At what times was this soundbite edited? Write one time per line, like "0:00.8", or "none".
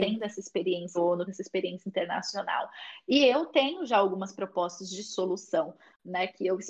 0:00.9
0:01.3